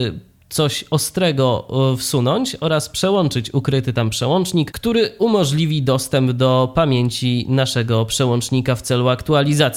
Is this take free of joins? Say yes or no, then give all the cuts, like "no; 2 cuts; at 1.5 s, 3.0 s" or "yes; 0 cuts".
yes; 0 cuts